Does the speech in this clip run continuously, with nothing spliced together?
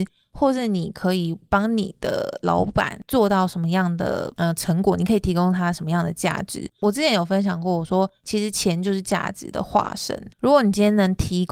no; 1 cut; at 10.3 s

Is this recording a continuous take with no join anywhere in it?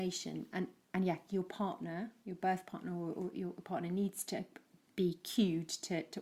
yes; 0 cuts

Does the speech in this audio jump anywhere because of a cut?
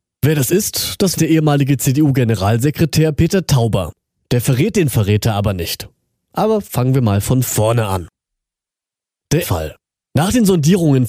yes; 2 cuts; at 1.2 s, 9.4 s

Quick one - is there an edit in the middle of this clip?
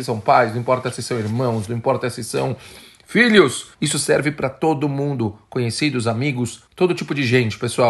yes; 2 cuts; at 3.7 s, 6.7 s

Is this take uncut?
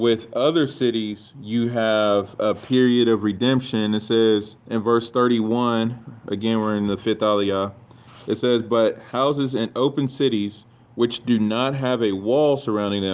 no; 1 cut; at 4.6 s

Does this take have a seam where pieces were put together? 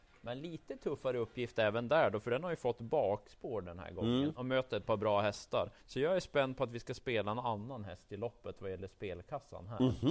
yes; 1 cut; at 5.8 s

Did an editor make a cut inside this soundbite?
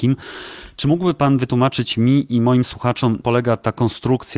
yes; 1 cut; at 3.2 s

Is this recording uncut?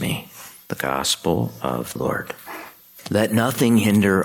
no; 1 cut; at 2.0 s

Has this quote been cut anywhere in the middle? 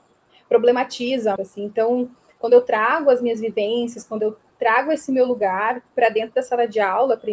yes; 1 cut; at 1.4 s

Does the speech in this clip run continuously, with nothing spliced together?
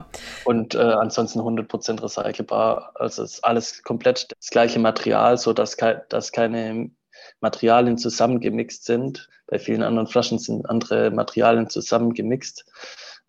yes; 0 cuts

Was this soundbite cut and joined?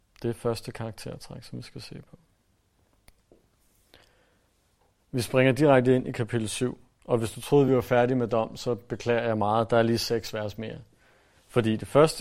no; 0 cuts

